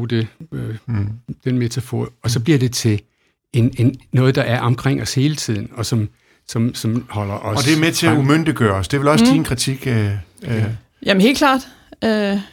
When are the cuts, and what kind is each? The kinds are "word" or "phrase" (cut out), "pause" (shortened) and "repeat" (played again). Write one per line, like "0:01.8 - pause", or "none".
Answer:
none